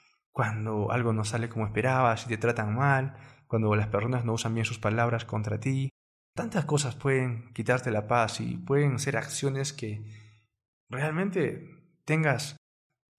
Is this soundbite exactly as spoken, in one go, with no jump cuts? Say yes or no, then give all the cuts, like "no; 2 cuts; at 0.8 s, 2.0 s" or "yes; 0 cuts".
yes; 0 cuts